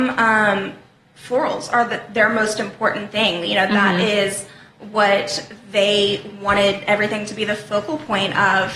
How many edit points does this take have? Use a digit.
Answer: 0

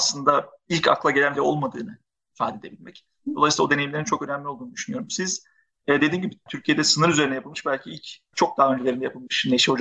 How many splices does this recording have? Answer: 3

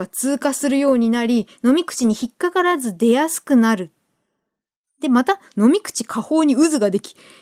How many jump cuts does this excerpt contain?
0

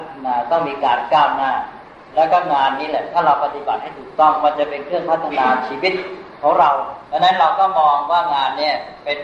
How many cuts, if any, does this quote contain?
1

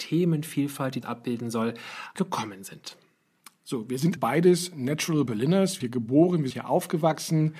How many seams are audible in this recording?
6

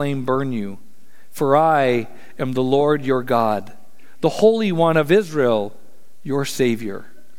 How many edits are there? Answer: 0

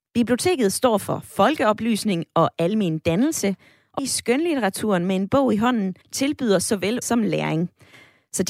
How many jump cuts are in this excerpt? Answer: 3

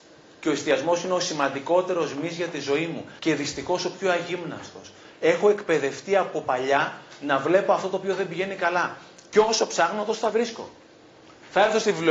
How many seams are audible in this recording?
1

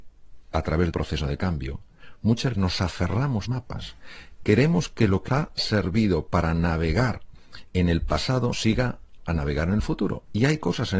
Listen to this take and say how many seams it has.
6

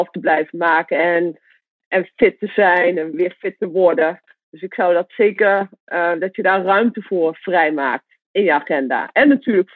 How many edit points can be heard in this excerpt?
1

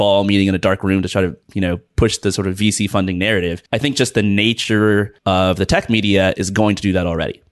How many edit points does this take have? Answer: 3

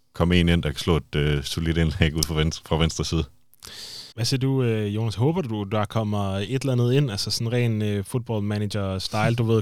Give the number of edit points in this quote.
1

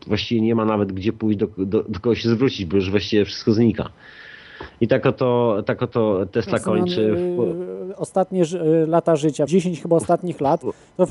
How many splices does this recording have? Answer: 1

